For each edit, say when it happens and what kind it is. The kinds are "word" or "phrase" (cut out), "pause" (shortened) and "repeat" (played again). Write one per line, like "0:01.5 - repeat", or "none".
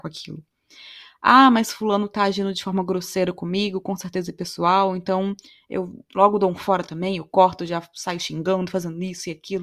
none